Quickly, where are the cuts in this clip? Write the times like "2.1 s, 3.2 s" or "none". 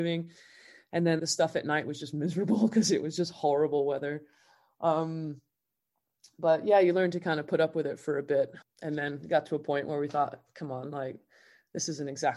1.2 s, 8.6 s